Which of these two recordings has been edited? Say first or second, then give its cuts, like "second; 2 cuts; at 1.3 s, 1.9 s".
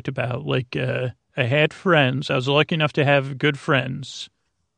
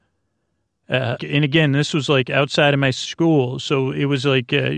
second; 1 cut; at 1.2 s